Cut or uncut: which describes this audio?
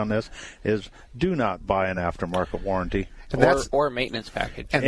uncut